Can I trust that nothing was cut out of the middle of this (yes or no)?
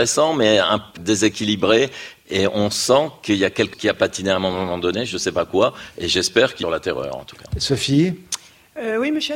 no